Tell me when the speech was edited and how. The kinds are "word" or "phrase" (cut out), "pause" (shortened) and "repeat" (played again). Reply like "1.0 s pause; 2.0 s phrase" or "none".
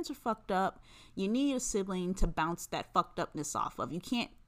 none